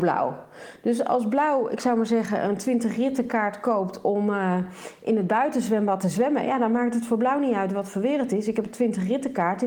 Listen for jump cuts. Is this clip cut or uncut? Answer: uncut